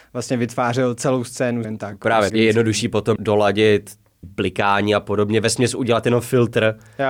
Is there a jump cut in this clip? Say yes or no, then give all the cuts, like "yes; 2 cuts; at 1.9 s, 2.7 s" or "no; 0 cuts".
yes; 4 cuts; at 1.6 s, 2.3 s, 3.2 s, 4.2 s